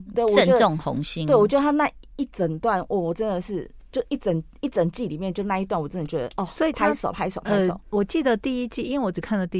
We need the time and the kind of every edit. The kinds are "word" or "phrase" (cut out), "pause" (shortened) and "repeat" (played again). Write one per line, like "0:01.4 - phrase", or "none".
0:07.8 - pause